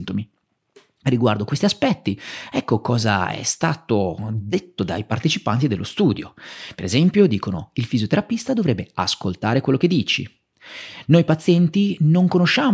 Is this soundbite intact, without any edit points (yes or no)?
yes